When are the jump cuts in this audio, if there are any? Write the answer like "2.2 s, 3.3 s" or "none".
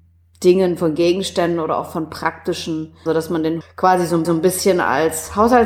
3.1 s, 3.6 s, 4.2 s